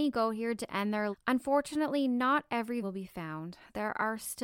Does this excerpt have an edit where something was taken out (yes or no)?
yes